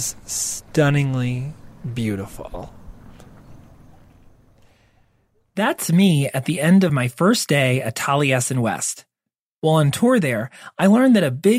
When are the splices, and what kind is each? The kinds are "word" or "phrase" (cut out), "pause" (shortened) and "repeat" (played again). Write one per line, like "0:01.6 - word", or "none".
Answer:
none